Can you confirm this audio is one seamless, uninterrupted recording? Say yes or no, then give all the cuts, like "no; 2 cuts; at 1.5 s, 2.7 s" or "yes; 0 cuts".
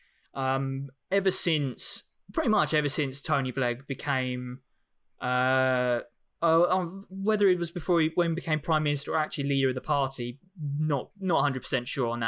yes; 0 cuts